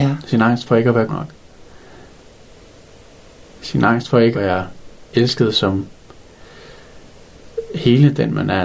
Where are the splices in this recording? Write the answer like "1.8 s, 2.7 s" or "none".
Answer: 1.1 s, 4.3 s, 5.1 s